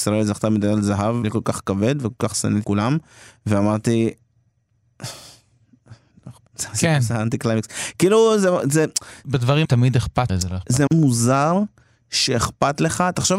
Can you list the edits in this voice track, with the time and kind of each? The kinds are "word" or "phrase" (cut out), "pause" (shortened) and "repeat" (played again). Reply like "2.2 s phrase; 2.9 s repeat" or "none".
1.2 s word; 2.6 s word; 9.6 s word; 10.3 s phrase; 10.9 s word